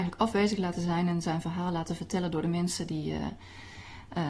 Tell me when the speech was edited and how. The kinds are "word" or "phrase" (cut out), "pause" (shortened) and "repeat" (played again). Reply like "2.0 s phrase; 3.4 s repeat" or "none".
none